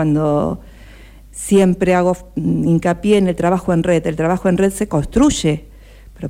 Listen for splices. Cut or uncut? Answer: uncut